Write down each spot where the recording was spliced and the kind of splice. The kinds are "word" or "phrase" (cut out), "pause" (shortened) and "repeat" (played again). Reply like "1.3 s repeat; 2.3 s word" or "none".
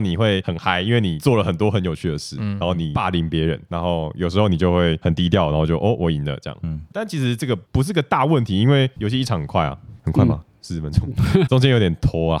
3.7 s word; 6.9 s word; 7.7 s pause; 10.0 s pause; 11.5 s word